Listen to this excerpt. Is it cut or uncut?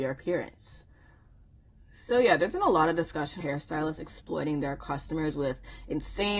cut